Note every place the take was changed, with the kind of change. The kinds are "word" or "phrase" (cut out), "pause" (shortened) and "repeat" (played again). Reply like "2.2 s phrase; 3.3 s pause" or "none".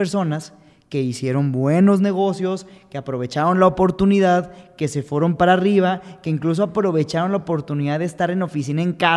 none